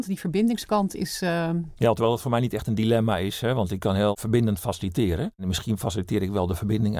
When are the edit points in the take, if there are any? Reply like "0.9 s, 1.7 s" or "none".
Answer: none